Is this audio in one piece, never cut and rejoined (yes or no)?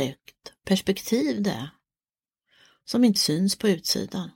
no